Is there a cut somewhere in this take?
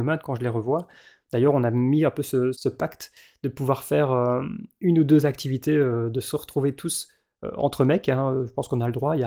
yes; 1 cut; at 2.5 s

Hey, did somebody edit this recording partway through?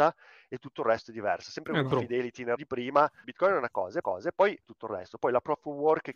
yes; 5 cuts; at 1.9 s, 2.6 s, 3.2 s, 4.0 s, 4.6 s

